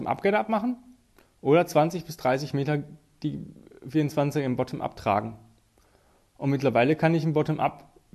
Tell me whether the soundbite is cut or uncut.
uncut